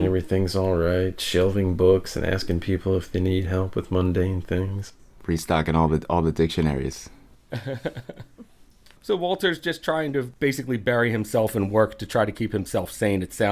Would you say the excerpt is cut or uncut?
uncut